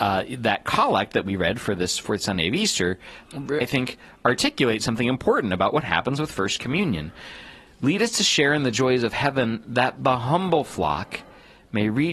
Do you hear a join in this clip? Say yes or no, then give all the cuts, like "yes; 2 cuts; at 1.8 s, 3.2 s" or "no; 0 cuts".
yes; 2 cuts; at 3.3 s, 3.6 s